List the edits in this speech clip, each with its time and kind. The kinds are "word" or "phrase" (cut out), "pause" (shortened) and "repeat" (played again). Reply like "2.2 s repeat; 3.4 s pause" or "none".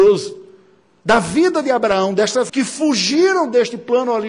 2.5 s word